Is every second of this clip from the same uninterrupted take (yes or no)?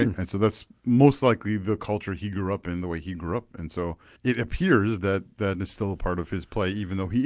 no